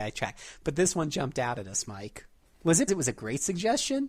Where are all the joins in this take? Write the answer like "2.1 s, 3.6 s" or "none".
2.9 s